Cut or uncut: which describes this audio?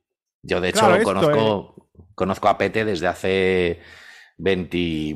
uncut